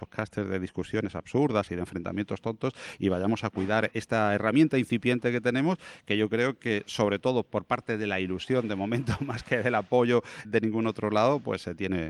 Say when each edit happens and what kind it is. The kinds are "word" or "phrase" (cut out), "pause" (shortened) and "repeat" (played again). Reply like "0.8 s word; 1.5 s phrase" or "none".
3.9 s word; 10.4 s word